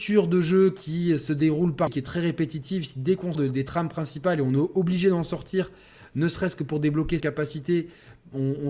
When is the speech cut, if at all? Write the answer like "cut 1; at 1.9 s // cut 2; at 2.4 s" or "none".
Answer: cut 1; at 1.9 s // cut 2; at 3.3 s // cut 3; at 7.2 s